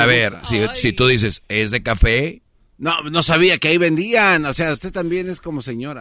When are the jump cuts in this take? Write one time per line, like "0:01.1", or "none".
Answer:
none